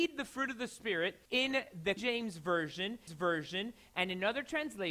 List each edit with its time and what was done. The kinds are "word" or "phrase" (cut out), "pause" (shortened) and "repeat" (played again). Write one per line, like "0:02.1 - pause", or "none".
0:01.3 - pause
0:02.0 - word
0:03.1 - repeat

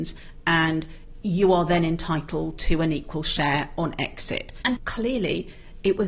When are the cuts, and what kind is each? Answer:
0:04.8 - word

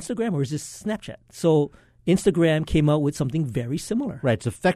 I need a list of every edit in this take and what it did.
none

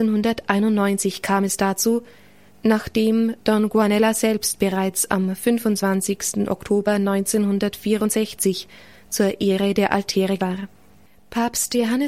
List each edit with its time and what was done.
0:10.4 - word

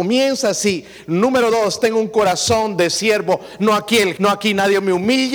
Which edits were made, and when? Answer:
0:04.2 - word

